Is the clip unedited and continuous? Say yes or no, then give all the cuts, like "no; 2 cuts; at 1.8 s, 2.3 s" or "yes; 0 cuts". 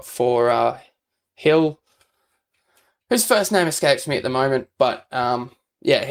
yes; 0 cuts